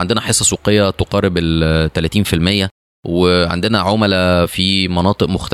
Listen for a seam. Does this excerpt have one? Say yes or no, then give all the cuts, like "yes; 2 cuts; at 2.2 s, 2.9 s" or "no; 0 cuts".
no; 0 cuts